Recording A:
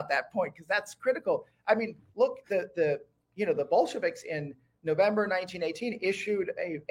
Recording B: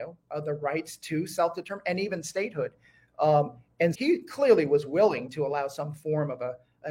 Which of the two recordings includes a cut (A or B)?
B